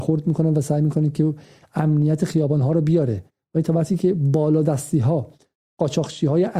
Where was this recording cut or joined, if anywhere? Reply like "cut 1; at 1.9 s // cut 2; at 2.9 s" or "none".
none